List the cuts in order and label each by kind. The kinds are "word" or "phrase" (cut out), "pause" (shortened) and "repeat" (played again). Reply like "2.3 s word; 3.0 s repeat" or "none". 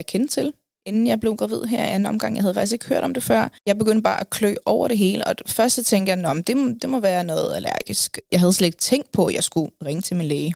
3.6 s pause